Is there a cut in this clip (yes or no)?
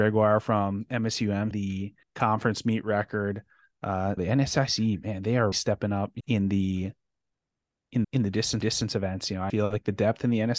yes